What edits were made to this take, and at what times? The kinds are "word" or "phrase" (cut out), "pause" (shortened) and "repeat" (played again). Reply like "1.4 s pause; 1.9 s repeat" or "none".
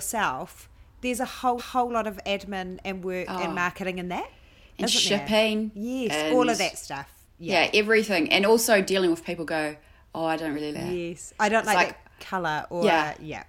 1.6 s repeat; 10.7 s word